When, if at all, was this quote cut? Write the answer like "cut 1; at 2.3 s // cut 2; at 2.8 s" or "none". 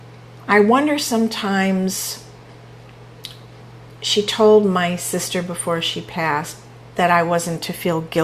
none